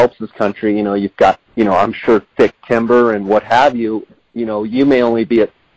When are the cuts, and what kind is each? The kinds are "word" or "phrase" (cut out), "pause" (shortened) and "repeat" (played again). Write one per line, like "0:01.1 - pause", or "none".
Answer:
0:01.5 - pause
0:04.1 - word